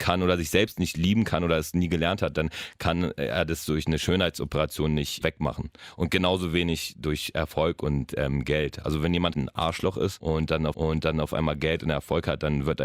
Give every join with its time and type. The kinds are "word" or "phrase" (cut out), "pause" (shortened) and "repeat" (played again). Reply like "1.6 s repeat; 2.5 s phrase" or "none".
5.2 s word; 9.3 s word; 10.7 s repeat